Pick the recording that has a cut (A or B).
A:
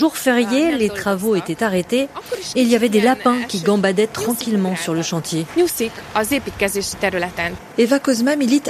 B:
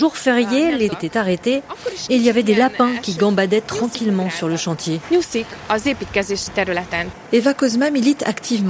B